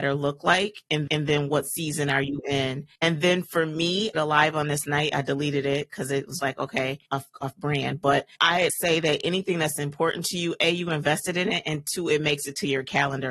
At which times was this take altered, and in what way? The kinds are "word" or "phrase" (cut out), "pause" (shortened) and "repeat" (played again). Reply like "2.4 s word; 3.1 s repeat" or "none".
1.1 s repeat; 2.9 s pause; 4.1 s phrase; 4.8 s word; 6.4 s word; 7.1 s word; 8.4 s word; 8.7 s word

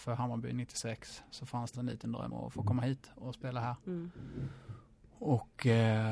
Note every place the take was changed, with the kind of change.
1.7 s word; 2.3 s word

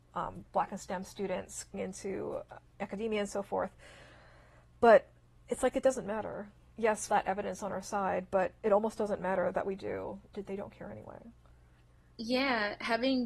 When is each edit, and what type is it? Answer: 1.7 s word; 6.7 s word; 7.1 s phrase; 10.3 s word

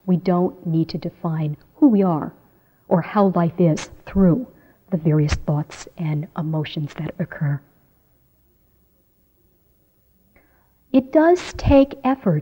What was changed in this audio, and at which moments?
none

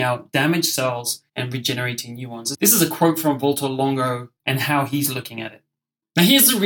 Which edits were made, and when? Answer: 1.3 s pause

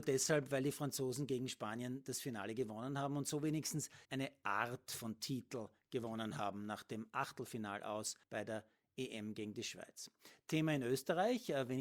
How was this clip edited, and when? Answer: 4.0 s pause; 8.2 s pause

